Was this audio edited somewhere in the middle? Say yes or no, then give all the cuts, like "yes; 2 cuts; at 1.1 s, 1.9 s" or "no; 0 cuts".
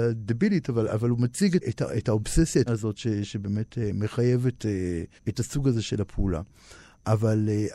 yes; 3 cuts; at 1.6 s, 2.7 s, 5.2 s